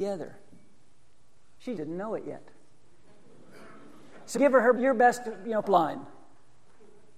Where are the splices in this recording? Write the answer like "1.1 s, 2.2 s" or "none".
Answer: 1.8 s, 4.4 s, 4.8 s, 5.6 s